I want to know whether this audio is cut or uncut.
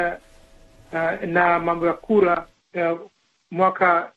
cut